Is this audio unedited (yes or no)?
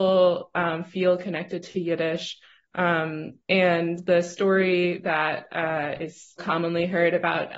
no